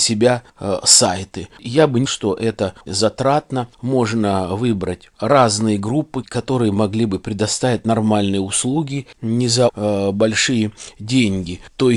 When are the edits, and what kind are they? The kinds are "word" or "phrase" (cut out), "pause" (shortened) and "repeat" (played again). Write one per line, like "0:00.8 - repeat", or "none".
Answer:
0:02.1 - word
0:02.9 - word
0:03.7 - pause
0:05.1 - pause
0:06.2 - word
0:09.7 - word